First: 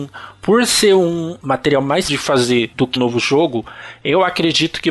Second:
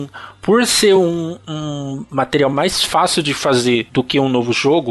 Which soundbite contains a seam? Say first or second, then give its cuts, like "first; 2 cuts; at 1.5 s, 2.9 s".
first; 3 cuts; at 1.4 s, 2.1 s, 3.0 s